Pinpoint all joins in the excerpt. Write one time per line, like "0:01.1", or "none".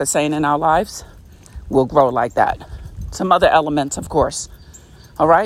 none